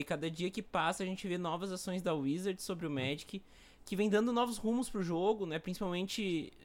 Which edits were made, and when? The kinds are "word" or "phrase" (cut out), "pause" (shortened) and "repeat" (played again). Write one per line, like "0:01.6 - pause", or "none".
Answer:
none